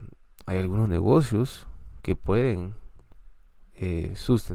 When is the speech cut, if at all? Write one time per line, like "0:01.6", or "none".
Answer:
none